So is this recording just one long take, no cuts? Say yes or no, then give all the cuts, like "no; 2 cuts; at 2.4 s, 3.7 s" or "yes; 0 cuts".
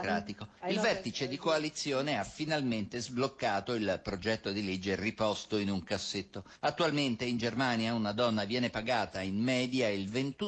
yes; 0 cuts